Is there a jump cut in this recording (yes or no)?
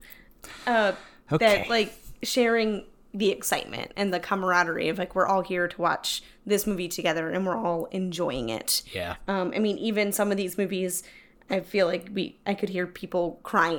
no